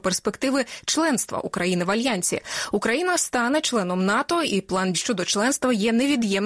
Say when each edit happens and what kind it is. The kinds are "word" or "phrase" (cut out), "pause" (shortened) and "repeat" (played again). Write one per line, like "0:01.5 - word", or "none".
0:04.9 - word